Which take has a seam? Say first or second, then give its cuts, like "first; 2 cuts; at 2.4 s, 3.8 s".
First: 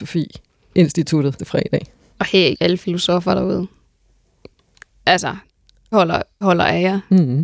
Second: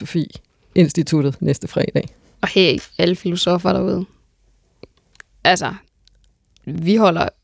first; 4 cuts; at 1.4 s, 2.5 s, 5.9 s, 6.4 s